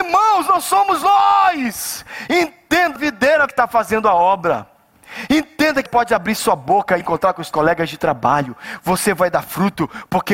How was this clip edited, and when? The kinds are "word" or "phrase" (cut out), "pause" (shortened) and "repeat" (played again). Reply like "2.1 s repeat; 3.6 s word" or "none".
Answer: 3.0 s word; 3.5 s word; 5.9 s word; 7.0 s word; 7.5 s word